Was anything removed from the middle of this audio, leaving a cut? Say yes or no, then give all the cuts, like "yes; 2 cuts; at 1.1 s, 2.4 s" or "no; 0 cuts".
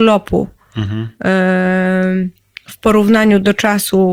no; 0 cuts